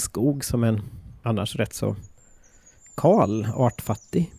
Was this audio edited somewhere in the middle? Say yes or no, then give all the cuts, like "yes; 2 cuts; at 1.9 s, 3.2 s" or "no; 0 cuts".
no; 0 cuts